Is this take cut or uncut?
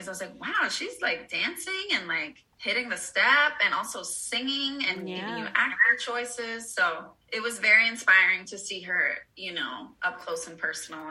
cut